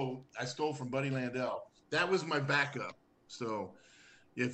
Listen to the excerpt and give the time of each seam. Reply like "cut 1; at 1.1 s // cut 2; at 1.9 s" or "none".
cut 1; at 1.8 s